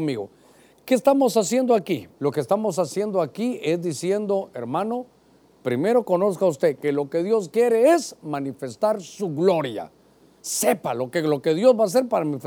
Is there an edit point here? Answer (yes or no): yes